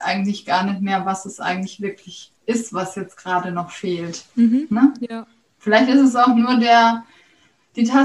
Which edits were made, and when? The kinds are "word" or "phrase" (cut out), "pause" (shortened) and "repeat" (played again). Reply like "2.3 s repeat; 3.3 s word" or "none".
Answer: 2.4 s pause; 5.4 s pause